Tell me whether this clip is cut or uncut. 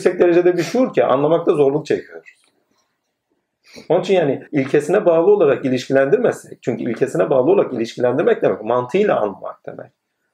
cut